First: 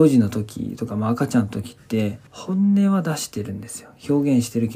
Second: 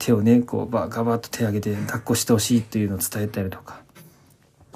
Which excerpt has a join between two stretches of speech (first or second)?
first